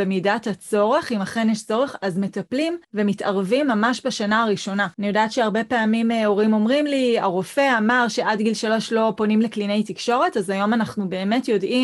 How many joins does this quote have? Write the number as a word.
two